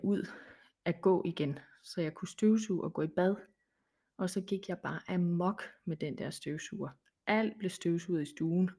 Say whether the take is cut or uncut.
uncut